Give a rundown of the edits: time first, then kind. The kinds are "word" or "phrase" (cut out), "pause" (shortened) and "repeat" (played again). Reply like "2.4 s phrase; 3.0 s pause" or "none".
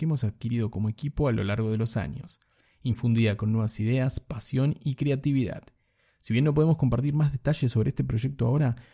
none